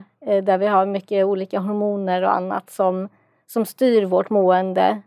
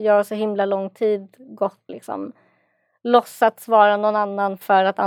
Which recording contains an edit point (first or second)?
second